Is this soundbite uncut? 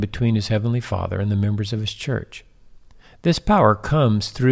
yes; 0 cuts

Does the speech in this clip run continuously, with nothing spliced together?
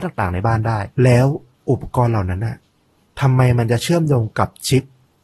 no; 1 cut; at 0.9 s

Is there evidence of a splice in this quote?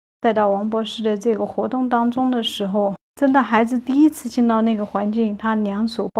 yes; 1 cut; at 3.0 s

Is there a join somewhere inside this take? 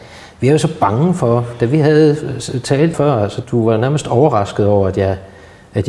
yes; 2 cuts; at 2.9 s, 3.4 s

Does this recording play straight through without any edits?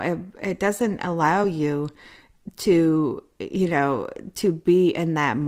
yes; 0 cuts

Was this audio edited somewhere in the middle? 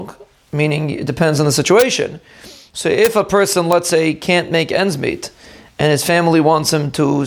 no; 0 cuts

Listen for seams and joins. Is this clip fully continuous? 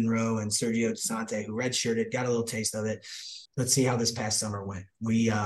no; 1 cut; at 3.5 s

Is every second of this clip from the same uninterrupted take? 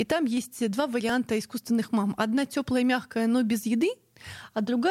yes; 0 cuts

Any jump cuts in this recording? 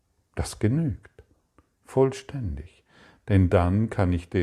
no; 0 cuts

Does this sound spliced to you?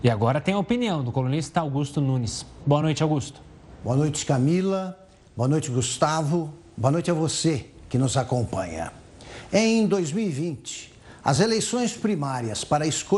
no; 0 cuts

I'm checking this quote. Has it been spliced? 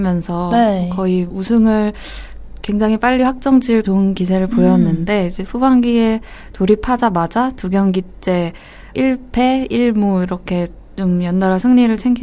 yes; 3 cuts; at 1.3 s, 3.8 s, 8.9 s

